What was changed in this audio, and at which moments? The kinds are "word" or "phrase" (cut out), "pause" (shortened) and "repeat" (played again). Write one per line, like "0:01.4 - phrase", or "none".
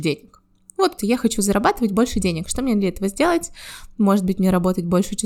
0:01.0 - word